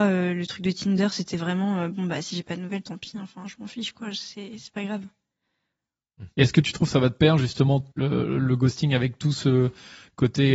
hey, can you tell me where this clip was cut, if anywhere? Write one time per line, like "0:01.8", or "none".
0:07.9